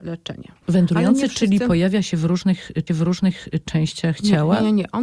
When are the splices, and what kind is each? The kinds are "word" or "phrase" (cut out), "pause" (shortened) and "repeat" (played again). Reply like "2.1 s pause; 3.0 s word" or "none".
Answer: 2.9 s repeat